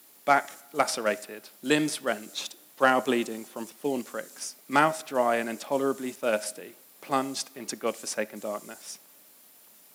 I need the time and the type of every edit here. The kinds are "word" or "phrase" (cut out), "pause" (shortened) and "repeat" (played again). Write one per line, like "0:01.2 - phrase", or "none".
0:01.6 - pause
0:04.6 - pause
0:06.8 - pause